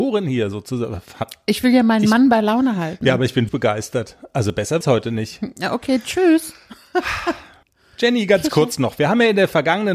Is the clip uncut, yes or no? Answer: no